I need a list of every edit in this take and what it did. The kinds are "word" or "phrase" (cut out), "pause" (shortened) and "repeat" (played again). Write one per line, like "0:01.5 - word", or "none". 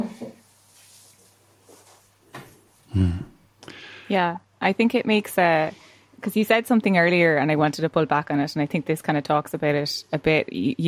none